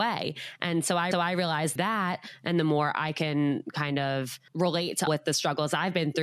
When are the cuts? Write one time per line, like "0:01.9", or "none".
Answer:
0:01.1
0:01.8
0:04.5
0:05.1